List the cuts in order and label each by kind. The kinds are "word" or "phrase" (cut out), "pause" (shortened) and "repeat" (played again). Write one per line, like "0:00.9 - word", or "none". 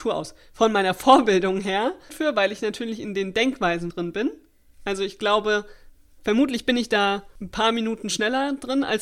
0:02.1 - word
0:03.9 - word